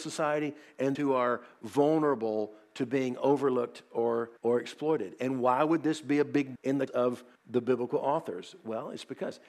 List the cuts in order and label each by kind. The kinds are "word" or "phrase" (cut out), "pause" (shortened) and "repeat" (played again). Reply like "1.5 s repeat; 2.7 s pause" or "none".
1.0 s word; 4.4 s pause; 6.6 s word; 6.9 s word; 7.4 s pause